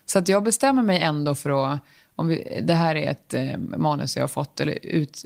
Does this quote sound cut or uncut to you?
uncut